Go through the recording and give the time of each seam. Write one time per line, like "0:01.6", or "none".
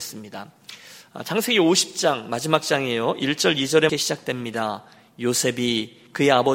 0:03.9